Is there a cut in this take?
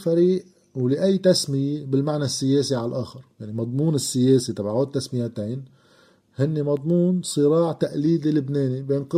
no; 0 cuts

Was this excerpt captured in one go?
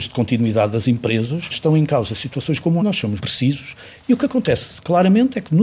no; 3 cuts; at 1.5 s, 2.8 s, 3.2 s

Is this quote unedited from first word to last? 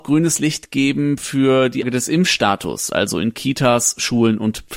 no; 1 cut; at 1.8 s

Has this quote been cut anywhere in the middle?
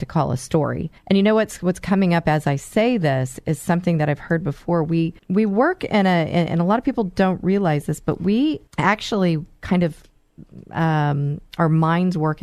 yes; 3 cuts; at 1.0 s, 5.2 s, 8.7 s

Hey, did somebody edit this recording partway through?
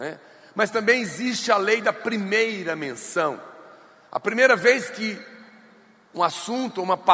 no; 0 cuts

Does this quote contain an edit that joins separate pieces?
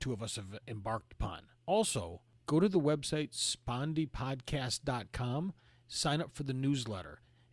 no; 0 cuts

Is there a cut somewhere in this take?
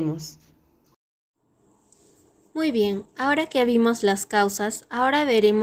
no; 0 cuts

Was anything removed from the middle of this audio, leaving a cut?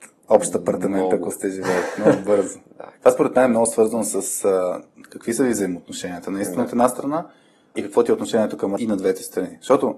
yes; 3 cuts; at 3.0 s, 7.7 s, 8.8 s

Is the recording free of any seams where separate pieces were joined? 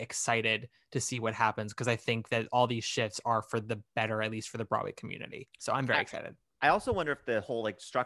yes; 0 cuts

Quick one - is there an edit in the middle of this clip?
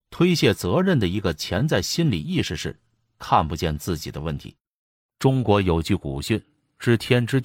no; 0 cuts

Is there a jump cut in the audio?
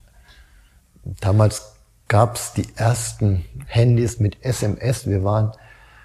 no; 0 cuts

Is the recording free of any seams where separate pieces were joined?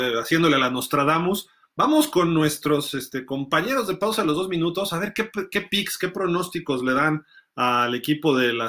yes; 0 cuts

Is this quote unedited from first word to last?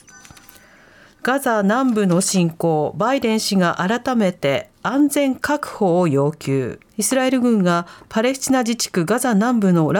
no; 1 cut; at 6.9 s

